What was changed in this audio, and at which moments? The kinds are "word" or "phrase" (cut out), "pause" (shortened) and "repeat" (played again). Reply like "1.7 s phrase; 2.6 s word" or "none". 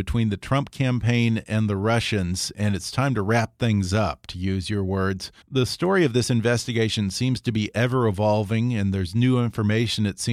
5.4 s pause